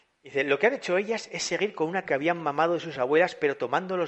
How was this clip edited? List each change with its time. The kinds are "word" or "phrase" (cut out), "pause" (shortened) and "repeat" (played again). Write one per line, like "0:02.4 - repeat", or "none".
0:02.1 - word